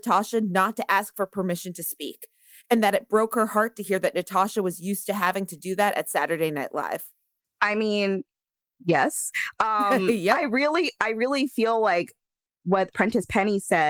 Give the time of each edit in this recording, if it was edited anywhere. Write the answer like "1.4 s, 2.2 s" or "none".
none